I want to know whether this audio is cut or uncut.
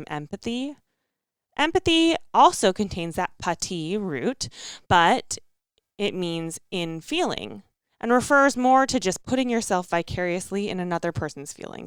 cut